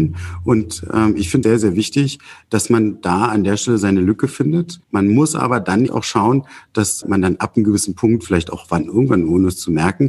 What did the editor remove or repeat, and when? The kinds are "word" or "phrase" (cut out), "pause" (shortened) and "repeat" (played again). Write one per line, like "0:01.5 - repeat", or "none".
0:01.4 - word
0:04.8 - pause
0:05.9 - word
0:07.0 - word